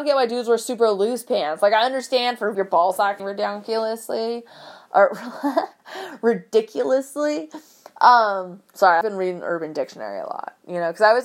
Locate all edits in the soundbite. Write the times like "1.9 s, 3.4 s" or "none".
2.5 s, 3.2 s, 9.0 s